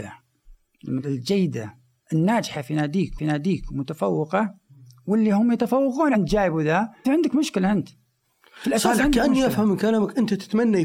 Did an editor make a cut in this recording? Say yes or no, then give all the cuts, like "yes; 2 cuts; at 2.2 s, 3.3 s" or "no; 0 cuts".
yes; 4 cuts; at 1.0 s, 3.2 s, 6.1 s, 7.0 s